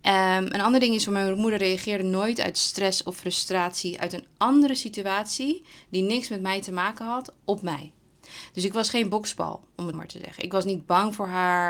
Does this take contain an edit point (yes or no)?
yes